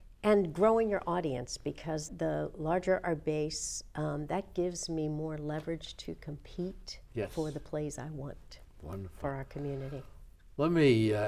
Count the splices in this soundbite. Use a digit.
1